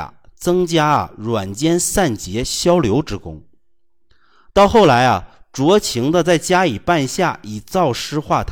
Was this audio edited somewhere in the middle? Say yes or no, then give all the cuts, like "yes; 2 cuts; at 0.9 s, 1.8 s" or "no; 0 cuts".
no; 0 cuts